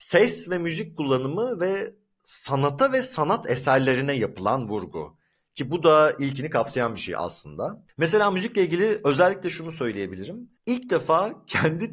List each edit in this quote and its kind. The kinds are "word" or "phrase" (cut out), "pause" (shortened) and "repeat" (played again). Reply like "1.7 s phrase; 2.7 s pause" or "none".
none

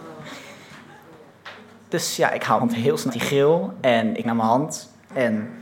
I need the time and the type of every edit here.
2.6 s word; 3.1 s word; 4.2 s word

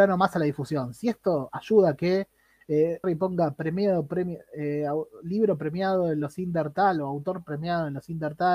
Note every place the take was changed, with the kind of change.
3.0 s phrase

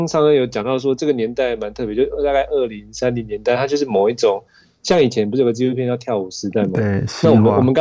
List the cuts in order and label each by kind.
none

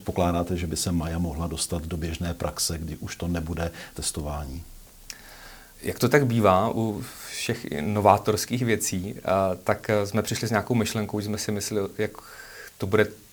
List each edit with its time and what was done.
3.9 s phrase; 5.7 s pause

